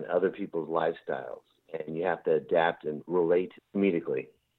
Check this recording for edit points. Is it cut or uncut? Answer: cut